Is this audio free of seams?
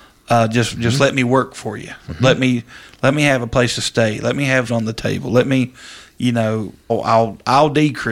no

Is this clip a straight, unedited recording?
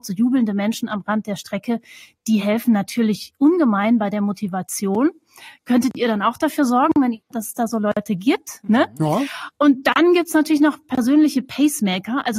yes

